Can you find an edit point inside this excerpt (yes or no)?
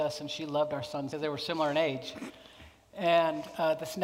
yes